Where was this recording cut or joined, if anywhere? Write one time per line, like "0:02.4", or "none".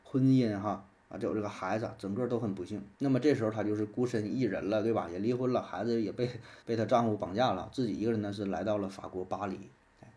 0:02.9
0:06.6